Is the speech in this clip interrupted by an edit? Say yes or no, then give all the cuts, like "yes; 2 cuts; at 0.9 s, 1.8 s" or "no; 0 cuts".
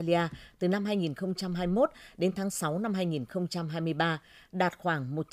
no; 0 cuts